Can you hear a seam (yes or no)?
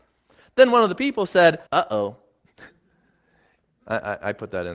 yes